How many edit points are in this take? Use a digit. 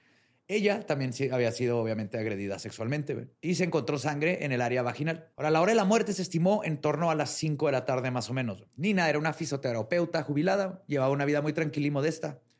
3